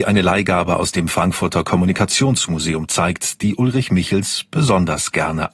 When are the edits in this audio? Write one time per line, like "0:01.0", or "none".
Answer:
none